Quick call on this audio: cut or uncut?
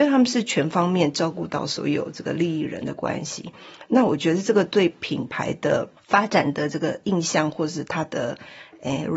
cut